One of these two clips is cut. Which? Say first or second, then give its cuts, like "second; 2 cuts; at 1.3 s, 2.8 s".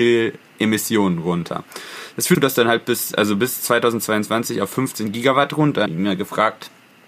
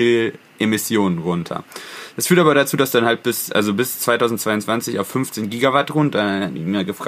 first; 2 cuts; at 2.3 s, 5.9 s